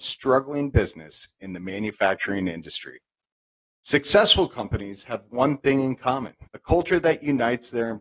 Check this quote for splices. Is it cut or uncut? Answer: cut